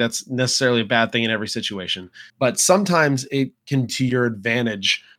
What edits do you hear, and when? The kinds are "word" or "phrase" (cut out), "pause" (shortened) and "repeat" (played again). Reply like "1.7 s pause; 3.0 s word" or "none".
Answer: 2.3 s pause; 3.9 s word